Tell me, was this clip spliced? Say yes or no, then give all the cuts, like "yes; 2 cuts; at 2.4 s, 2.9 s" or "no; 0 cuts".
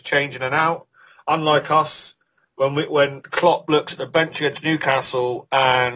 no; 0 cuts